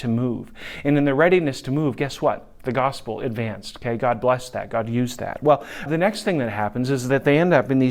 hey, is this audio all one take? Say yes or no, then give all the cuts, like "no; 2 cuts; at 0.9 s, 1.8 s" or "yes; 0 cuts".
no; 1 cut; at 5.9 s